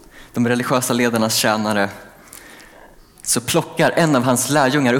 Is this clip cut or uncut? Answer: uncut